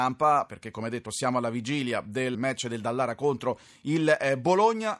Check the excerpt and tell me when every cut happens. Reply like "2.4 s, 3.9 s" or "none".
2.3 s